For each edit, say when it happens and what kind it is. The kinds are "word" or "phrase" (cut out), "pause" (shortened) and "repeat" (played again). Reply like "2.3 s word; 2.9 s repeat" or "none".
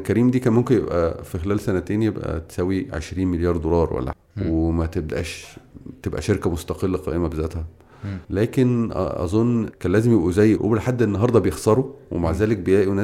4.1 s word; 8.2 s pause; 9.7 s phrase; 10.6 s word